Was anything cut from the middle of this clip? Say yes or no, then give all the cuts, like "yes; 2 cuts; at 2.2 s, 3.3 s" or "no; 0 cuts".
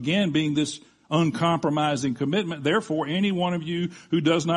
no; 0 cuts